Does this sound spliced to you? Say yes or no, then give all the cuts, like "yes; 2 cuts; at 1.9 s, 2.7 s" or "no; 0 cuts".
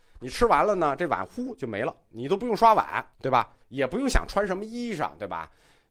yes; 2 cuts; at 3.1 s, 3.6 s